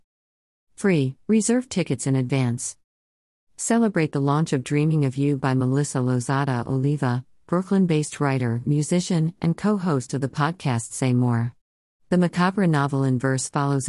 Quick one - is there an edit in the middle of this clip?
no; 0 cuts

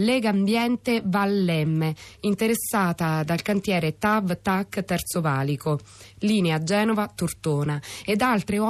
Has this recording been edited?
no; 0 cuts

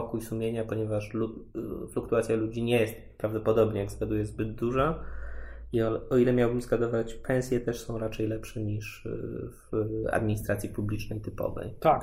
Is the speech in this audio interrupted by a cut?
no; 0 cuts

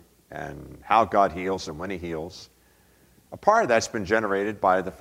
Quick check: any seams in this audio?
no; 0 cuts

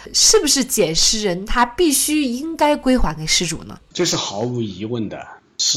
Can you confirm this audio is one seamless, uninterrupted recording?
no; 1 cut; at 3.8 s

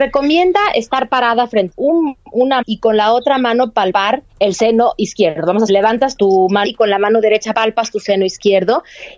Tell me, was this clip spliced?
yes; 6 cuts; at 1.7 s, 2.6 s, 4.3 s, 5.7 s, 6.2 s, 6.6 s

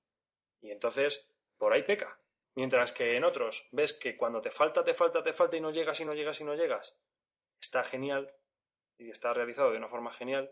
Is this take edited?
no; 0 cuts

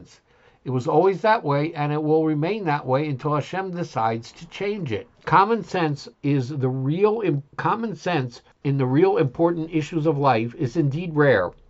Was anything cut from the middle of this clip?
yes; 4 cuts; at 5.1 s, 6.1 s, 7.5 s, 8.5 s

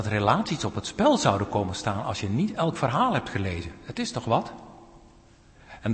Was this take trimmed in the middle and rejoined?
no; 0 cuts

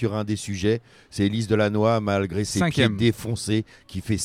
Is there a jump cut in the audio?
no; 0 cuts

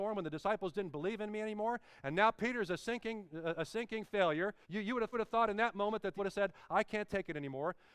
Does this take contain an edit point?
yes; 3 cuts; at 4.6 s, 5.1 s, 6.2 s

